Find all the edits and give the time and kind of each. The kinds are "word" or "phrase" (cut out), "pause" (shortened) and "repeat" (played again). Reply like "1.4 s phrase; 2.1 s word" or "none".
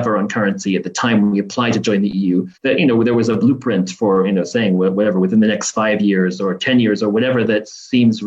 2.5 s pause

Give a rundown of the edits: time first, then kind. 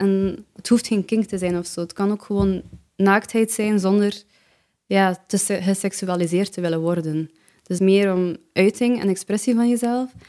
7.8 s phrase

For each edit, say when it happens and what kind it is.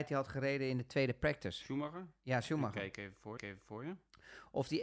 3.4 s repeat

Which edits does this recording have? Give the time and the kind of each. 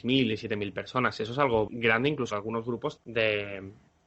1.7 s word; 2.3 s word; 3.0 s word

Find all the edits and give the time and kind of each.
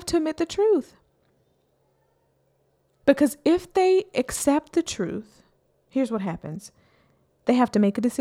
none

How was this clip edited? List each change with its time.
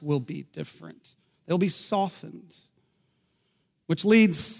none

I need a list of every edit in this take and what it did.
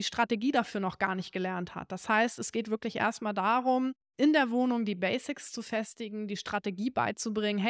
4.0 s pause

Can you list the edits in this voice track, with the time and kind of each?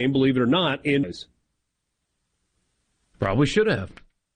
1.0 s word

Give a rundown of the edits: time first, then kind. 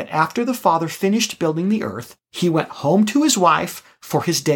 none

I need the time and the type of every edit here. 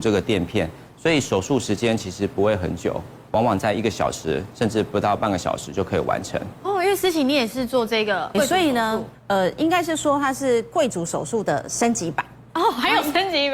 8.3 s word; 9.1 s word

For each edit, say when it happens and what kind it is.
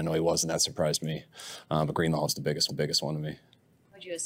2.7 s repeat

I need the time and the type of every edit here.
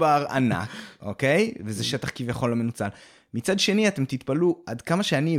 none

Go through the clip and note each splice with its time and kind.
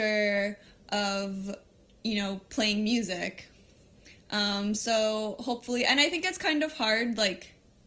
none

